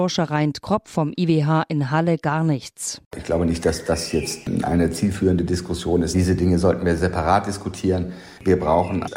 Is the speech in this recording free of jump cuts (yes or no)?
yes